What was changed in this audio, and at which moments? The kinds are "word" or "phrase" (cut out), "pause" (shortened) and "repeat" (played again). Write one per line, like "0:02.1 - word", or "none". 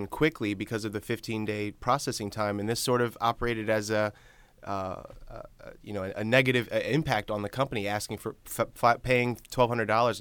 none

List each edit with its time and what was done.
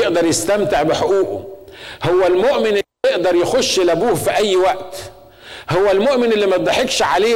none

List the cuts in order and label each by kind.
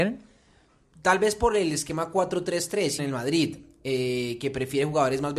0:03.0 - phrase

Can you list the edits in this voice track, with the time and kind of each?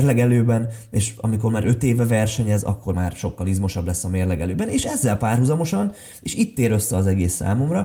0:02.9 - word

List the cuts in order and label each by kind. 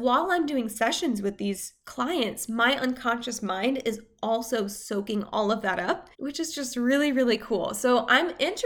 0:06.1 - pause

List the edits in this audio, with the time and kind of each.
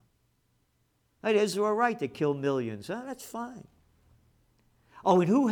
0:01.5 - word

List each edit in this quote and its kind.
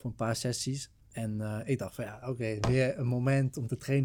0:01.0 - pause

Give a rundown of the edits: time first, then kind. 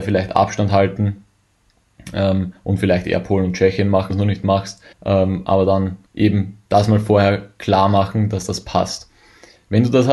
0:04.1 - word
0:04.9 - pause
0:06.1 - pause

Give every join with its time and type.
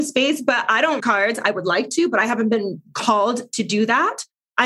0:01.0 - word

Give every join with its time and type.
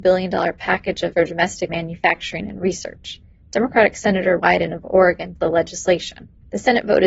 0:01.1 - word
0:01.7 - word
0:04.4 - word
0:05.4 - word

